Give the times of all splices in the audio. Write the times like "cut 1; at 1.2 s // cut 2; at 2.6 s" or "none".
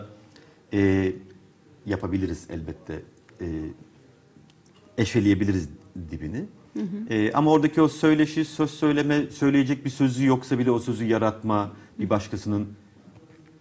none